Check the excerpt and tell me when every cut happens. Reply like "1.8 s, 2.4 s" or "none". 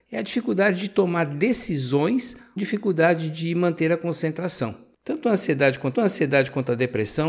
2.6 s, 5.9 s